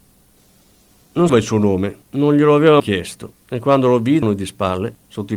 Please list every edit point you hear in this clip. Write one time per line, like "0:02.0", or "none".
0:01.3
0:02.0
0:02.8
0:03.4
0:04.2